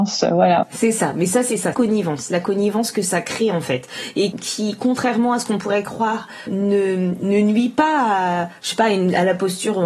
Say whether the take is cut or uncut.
cut